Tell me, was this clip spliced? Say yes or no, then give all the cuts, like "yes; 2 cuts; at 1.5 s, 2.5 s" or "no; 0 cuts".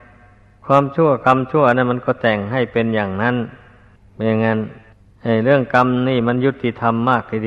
yes; 2 cuts; at 4.0 s, 4.9 s